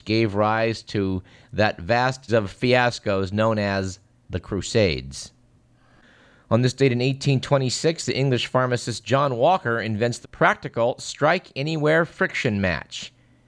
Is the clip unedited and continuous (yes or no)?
no